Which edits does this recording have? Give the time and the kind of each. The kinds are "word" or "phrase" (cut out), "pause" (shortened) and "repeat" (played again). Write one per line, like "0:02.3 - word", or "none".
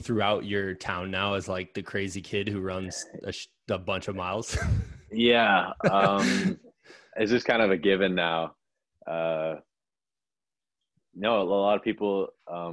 none